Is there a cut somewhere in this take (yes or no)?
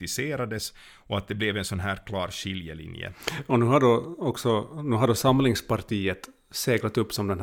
no